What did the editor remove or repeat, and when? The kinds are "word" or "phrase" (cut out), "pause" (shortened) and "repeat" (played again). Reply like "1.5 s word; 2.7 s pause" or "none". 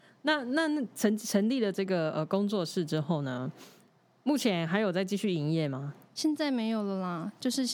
none